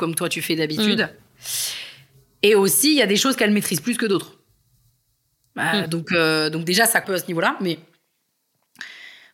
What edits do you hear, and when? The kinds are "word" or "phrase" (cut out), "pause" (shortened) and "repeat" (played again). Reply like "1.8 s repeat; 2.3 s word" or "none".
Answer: 7.0 s phrase